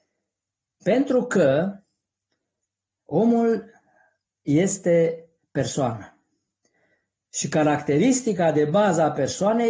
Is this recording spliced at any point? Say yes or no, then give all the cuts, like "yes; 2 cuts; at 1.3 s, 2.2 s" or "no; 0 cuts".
no; 0 cuts